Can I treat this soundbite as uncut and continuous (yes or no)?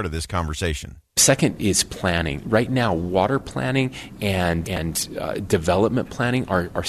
no